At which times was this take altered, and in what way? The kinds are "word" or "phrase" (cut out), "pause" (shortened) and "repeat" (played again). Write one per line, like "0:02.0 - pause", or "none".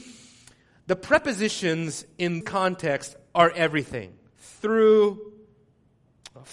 0:02.4 - word